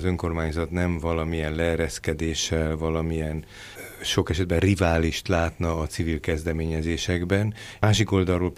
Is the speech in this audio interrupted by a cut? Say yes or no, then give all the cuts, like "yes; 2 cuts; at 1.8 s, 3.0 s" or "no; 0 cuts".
no; 0 cuts